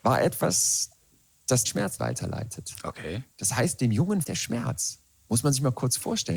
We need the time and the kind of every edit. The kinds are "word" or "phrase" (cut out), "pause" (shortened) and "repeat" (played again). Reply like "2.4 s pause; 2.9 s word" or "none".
1.7 s word; 2.0 s word; 4.2 s word

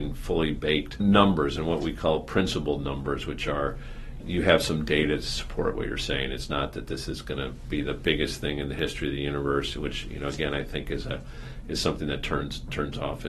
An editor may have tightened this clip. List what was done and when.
none

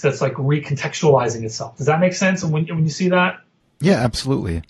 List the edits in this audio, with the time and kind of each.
none

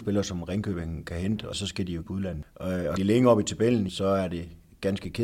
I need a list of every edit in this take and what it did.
1.5 s word; 2.0 s word; 3.0 s word; 3.9 s word

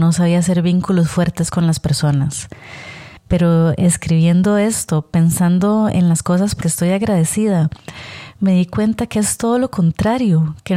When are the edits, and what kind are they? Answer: 3.2 s pause; 6.6 s phrase

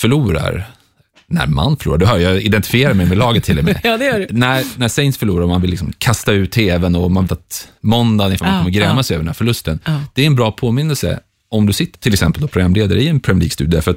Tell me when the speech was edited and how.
7.3 s word; 8.4 s word; 11.9 s word

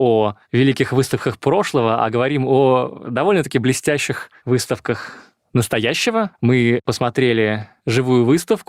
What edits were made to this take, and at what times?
6.3 s pause

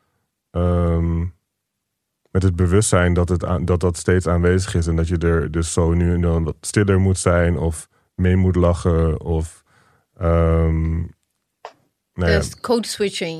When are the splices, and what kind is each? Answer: none

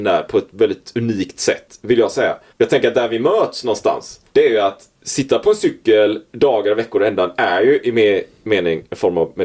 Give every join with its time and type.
2.5 s pause; 4.3 s pause; 4.9 s pause; 6.3 s pause

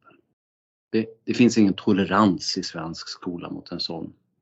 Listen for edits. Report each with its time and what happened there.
none

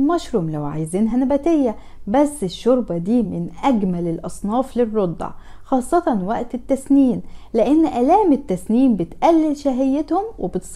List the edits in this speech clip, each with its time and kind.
none

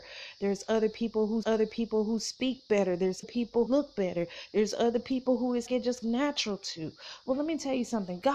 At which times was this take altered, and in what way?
1.4 s repeat; 3.2 s word; 3.7 s word; 5.7 s phrase; 6.0 s word

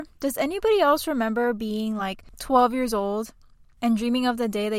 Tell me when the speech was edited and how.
none

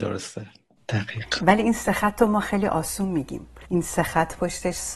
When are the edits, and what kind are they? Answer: 3.6 s pause

